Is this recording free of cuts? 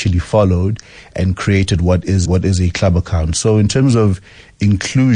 no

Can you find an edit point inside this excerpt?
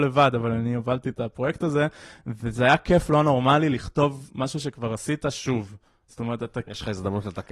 no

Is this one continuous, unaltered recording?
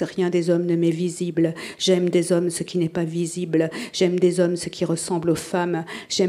yes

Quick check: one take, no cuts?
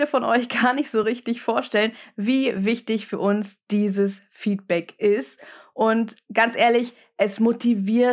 yes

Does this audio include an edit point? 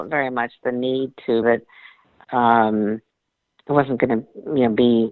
yes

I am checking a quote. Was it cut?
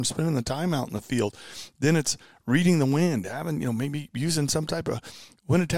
no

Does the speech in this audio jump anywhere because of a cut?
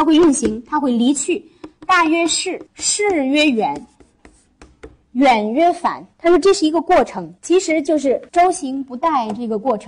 yes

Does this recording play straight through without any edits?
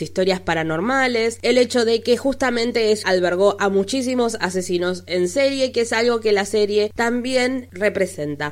no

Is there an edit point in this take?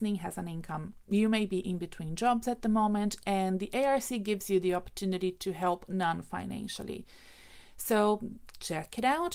no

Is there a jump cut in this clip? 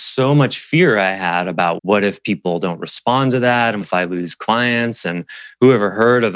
yes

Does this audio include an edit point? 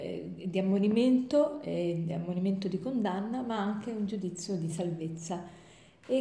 no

